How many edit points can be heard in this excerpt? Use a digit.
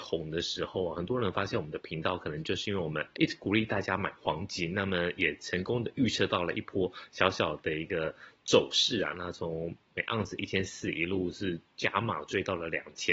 1